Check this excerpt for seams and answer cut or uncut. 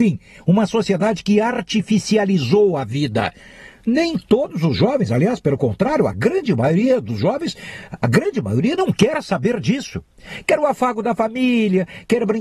uncut